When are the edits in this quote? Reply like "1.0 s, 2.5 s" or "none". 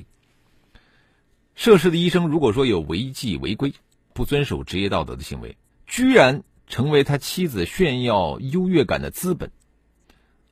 4.1 s, 5.7 s